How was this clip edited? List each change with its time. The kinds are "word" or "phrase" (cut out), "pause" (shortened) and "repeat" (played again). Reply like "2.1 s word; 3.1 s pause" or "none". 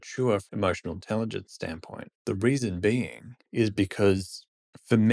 2.2 s pause; 3.5 s pause